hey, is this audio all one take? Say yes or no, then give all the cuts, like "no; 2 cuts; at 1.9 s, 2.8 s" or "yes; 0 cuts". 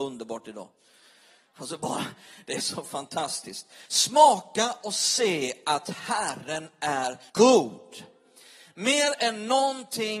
no; 1 cut; at 7.3 s